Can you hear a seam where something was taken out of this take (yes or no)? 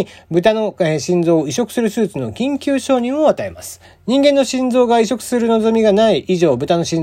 yes